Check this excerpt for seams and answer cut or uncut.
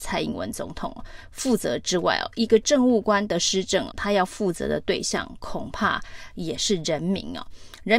cut